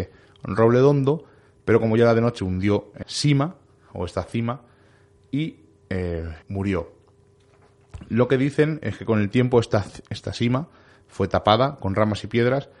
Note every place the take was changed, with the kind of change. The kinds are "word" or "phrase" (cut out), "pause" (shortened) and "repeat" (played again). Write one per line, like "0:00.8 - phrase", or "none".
0:02.4 - word
0:03.0 - word
0:06.4 - pause